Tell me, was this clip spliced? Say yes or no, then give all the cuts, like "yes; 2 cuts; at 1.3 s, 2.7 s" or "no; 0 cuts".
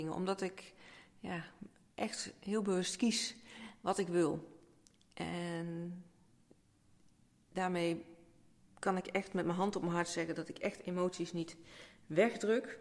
no; 0 cuts